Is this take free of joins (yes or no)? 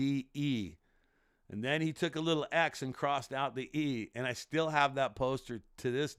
yes